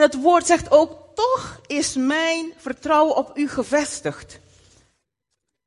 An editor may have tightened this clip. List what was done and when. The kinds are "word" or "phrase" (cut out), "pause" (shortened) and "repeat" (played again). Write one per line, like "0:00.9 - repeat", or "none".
none